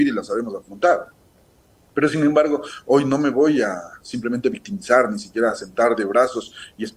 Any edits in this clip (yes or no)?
no